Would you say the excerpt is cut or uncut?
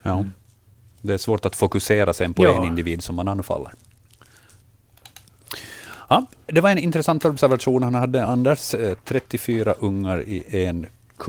uncut